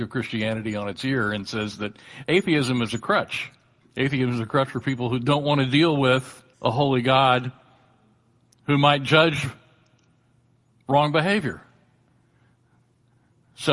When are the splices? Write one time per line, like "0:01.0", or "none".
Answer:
0:03.8
0:06.5

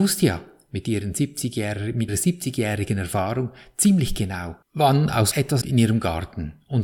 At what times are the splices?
0:02.1
0:04.6
0:05.3
0:05.6

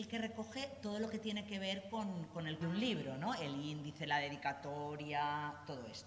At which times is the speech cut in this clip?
0:02.6

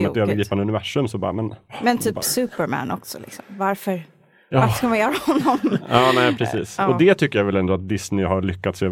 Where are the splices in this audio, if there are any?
none

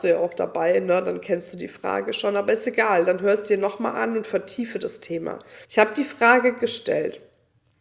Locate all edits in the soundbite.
0:05.6

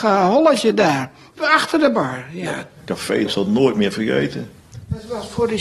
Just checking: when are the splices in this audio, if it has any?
0:03.3

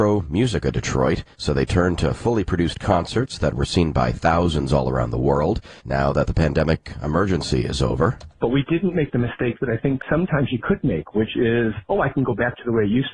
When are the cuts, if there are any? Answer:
0:01.3
0:05.8

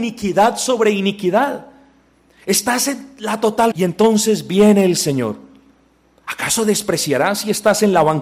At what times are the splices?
0:03.7

